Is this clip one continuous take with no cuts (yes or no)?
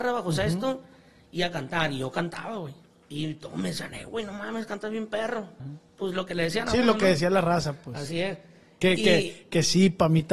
no